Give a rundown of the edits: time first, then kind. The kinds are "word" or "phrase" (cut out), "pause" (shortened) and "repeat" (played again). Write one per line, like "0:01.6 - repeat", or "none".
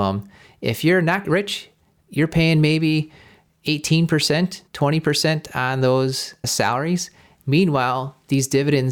0:01.2 - word
0:04.7 - pause